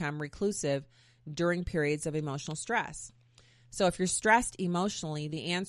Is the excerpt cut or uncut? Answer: uncut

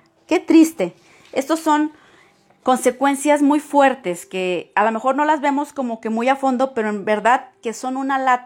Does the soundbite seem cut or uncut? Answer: uncut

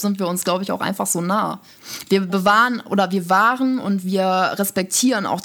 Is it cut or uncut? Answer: uncut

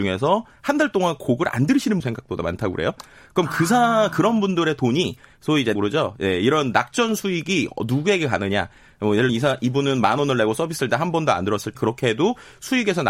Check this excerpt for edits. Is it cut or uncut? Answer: cut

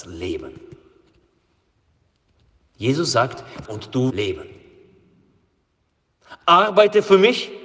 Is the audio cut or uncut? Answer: cut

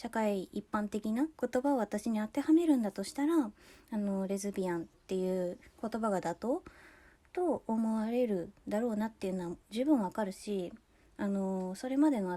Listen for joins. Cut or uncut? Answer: cut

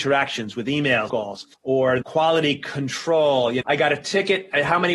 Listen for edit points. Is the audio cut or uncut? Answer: cut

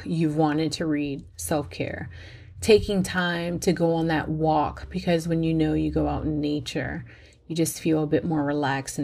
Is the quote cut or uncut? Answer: uncut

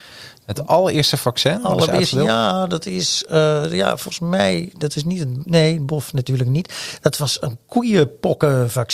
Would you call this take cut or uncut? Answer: uncut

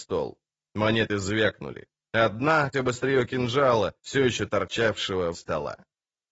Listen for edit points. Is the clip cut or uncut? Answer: cut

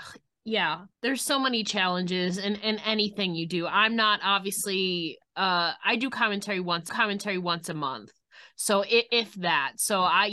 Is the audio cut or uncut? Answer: cut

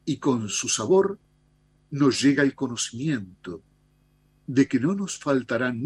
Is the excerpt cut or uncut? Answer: uncut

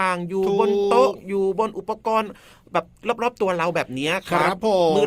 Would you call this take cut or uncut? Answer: uncut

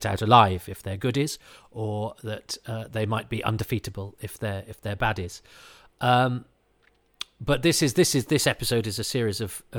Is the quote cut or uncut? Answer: uncut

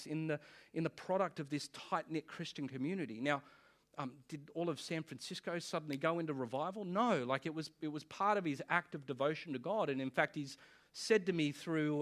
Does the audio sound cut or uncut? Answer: uncut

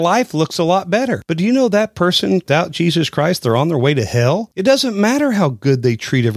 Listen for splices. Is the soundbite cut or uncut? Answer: uncut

